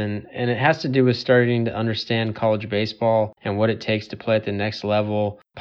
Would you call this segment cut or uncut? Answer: cut